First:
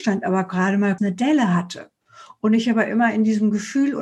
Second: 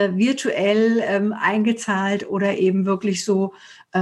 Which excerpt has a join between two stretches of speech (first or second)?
first